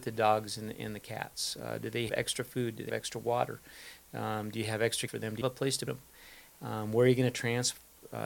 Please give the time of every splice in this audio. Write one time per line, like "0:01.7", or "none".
0:02.1
0:02.9
0:05.1
0:05.4
0:05.9